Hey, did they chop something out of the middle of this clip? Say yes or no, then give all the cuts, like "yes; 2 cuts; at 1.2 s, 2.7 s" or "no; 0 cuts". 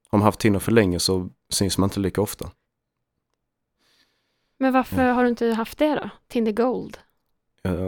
no; 0 cuts